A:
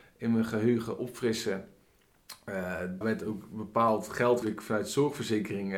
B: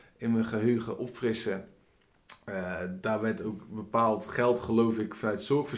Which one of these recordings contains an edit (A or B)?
A